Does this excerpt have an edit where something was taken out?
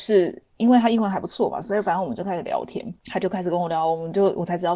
yes; 1 cut; at 3.0 s

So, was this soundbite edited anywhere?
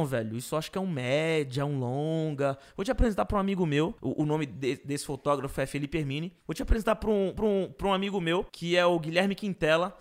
yes; 4 cuts; at 4.0 s, 6.4 s, 7.4 s, 8.5 s

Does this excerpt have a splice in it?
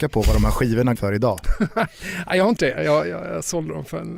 yes; 2 cuts; at 1.0 s, 2.6 s

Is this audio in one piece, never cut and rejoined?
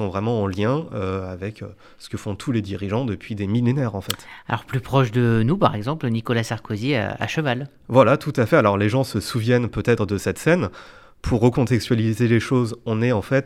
yes; 0 cuts

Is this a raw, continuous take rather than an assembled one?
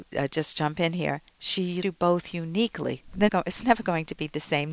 no; 2 cuts; at 1.8 s, 3.3 s

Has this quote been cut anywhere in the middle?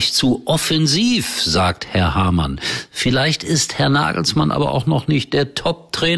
no; 0 cuts

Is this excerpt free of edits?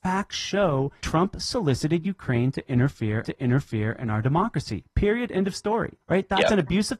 no; 3 cuts; at 1.0 s, 3.2 s, 6.0 s

